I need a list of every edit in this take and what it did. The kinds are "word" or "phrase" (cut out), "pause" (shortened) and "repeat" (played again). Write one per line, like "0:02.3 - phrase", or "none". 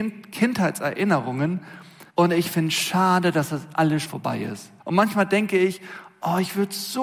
0:02.1 - pause
0:04.0 - word
0:04.8 - pause